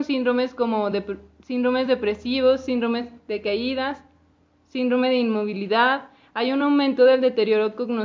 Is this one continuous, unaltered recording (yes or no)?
yes